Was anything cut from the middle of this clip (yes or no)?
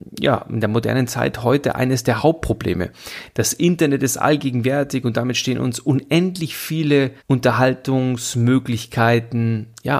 yes